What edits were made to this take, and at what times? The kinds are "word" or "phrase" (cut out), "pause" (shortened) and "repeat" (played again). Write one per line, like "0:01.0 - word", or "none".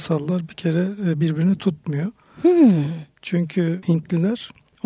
none